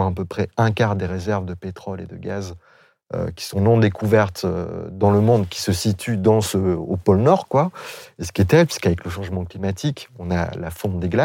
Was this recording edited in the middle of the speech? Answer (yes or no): no